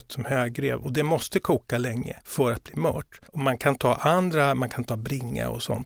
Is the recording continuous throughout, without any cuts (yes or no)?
no